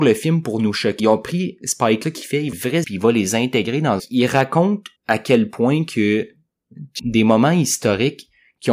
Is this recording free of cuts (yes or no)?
no